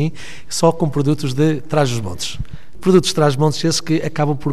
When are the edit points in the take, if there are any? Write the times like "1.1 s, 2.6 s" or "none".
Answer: none